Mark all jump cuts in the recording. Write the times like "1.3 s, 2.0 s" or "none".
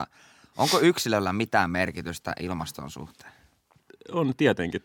none

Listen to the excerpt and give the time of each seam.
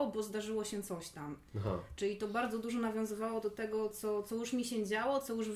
none

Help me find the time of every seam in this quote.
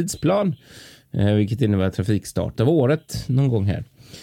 2.6 s

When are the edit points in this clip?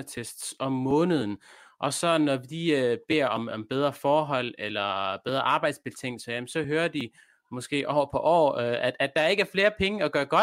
none

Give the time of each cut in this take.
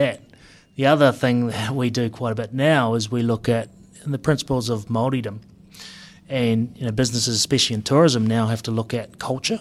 none

